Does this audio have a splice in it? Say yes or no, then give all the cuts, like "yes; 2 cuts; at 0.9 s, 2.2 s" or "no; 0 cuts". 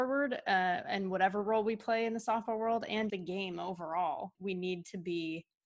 yes; 2 cuts; at 3.1 s, 4.3 s